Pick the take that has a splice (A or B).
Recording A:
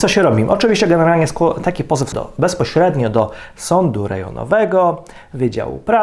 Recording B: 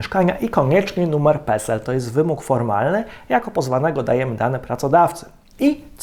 A